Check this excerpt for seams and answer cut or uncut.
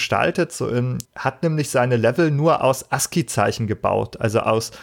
cut